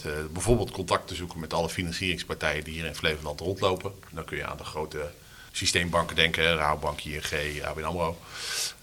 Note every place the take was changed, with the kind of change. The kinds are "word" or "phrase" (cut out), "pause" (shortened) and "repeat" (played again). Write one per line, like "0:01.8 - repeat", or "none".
0:05.5 - pause